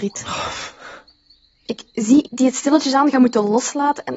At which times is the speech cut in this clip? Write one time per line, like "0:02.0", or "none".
0:02.2